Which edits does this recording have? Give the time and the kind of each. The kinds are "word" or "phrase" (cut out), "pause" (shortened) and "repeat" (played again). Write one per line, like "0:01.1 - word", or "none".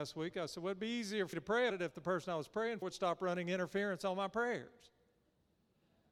0:01.3 - word
0:01.7 - word
0:02.8 - word